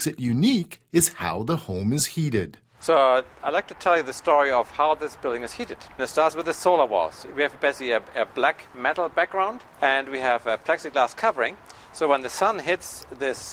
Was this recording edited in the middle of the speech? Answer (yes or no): yes